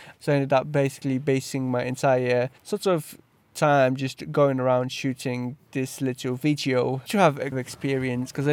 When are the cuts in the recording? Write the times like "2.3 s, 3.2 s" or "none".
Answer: 2.6 s, 7.1 s, 7.5 s